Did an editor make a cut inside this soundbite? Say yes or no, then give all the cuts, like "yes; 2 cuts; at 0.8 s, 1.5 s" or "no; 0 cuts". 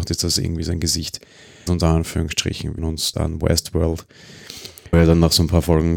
yes; 4 cuts; at 1.7 s, 2.8 s, 3.1 s, 4.9 s